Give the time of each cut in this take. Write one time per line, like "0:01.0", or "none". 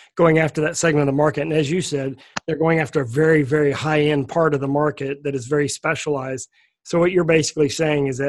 none